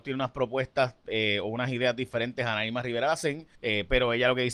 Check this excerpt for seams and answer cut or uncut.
cut